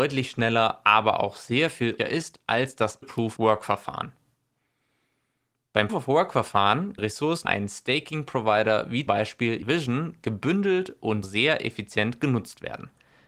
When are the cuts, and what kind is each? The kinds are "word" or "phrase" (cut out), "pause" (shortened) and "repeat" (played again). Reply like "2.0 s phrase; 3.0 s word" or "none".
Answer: 2.0 s word; 3.0 s word; 3.4 s word; 5.9 s word; 7.0 s word; 7.4 s word; 9.1 s word; 9.6 s word; 11.2 s word